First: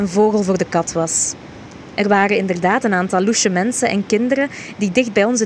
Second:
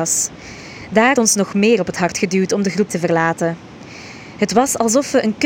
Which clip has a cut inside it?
second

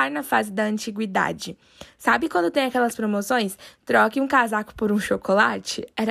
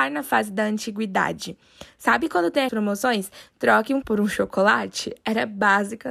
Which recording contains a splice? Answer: second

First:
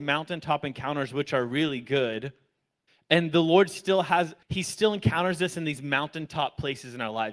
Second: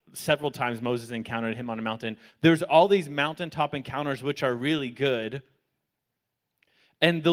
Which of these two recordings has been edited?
first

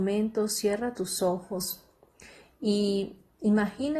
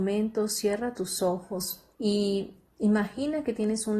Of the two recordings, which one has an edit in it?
second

